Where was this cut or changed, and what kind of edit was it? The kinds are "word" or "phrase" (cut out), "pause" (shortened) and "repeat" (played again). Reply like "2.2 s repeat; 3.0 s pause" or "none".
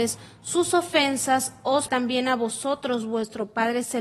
1.9 s word